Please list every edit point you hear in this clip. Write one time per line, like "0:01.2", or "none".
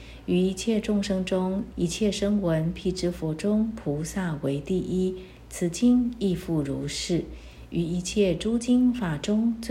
0:01.7